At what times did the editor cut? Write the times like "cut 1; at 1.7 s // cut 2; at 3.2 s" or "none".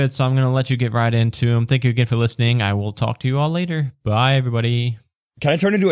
none